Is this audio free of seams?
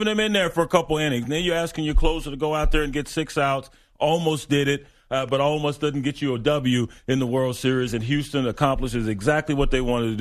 yes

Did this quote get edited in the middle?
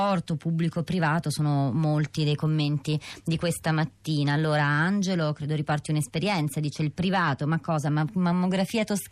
no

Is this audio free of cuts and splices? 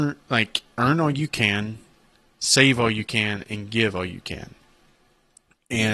yes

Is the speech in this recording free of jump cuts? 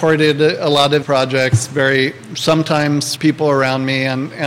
no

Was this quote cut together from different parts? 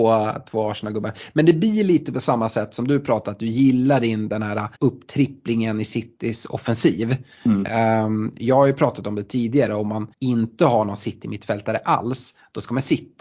yes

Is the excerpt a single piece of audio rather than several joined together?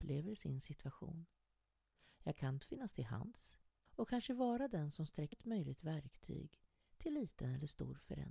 no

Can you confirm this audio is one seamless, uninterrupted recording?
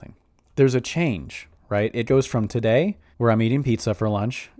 no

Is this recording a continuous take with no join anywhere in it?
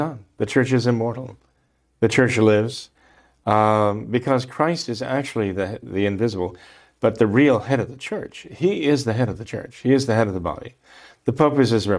yes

